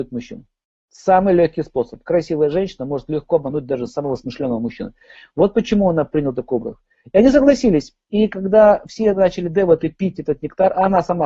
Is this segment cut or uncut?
uncut